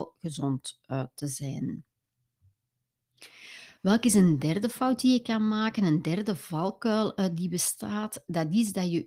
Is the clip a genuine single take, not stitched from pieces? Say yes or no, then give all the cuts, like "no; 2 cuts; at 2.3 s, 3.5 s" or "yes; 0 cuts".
yes; 0 cuts